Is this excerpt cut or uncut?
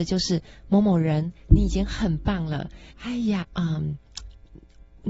cut